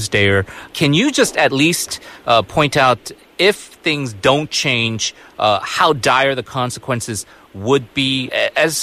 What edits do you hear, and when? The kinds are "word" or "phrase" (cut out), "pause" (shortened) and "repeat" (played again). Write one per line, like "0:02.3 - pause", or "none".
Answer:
none